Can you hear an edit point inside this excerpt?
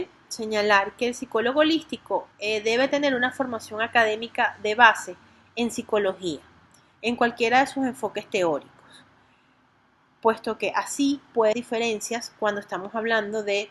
yes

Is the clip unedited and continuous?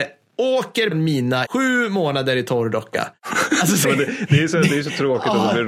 no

